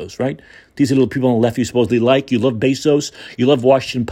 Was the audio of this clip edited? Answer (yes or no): no